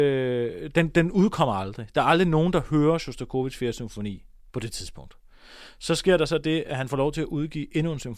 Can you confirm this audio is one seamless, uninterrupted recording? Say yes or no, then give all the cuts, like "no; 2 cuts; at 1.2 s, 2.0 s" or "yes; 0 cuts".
yes; 0 cuts